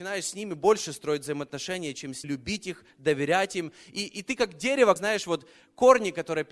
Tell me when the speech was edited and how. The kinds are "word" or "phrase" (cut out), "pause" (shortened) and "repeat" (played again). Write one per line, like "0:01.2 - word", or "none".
0:02.2 - word
0:05.0 - word